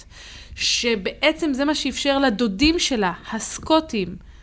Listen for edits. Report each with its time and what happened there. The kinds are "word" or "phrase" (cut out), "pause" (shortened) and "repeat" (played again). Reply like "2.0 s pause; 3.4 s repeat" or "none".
none